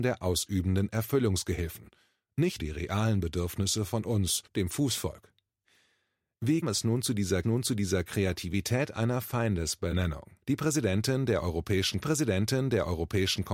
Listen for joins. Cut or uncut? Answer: cut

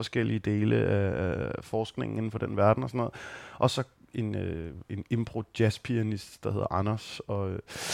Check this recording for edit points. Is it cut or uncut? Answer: uncut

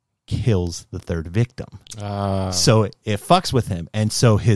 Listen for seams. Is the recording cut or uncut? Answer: uncut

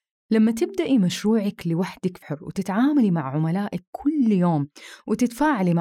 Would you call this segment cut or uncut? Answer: cut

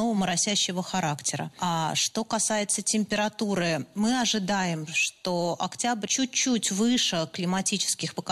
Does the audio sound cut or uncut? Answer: cut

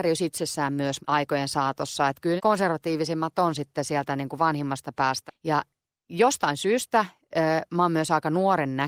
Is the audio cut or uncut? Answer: cut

